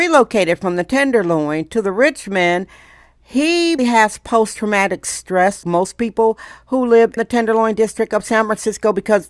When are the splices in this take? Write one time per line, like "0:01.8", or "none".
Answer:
0:03.8
0:05.6
0:07.2